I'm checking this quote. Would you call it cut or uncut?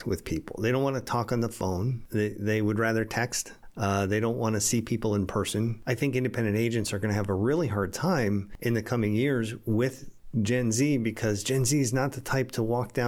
uncut